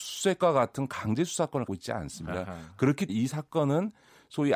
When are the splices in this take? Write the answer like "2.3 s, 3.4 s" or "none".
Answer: 1.7 s, 3.1 s